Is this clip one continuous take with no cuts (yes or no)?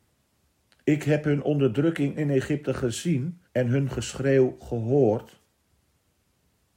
no